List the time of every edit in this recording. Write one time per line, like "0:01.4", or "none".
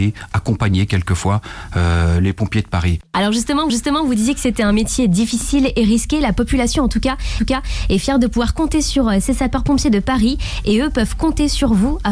0:03.7
0:07.4